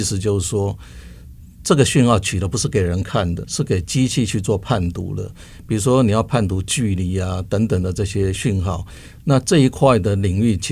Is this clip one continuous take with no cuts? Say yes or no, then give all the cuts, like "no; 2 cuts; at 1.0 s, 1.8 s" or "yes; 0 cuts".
no; 1 cut; at 3.4 s